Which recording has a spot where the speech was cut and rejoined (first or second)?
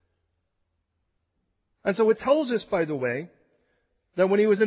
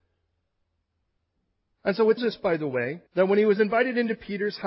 second